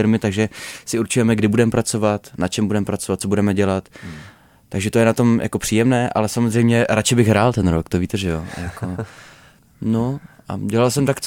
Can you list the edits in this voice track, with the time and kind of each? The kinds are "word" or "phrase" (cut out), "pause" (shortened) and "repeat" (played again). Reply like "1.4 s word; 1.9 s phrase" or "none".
none